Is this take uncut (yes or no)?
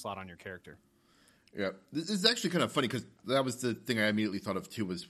yes